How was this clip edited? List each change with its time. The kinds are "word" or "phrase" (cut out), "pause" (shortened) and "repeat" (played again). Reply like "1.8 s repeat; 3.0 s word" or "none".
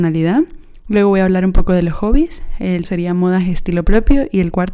2.8 s word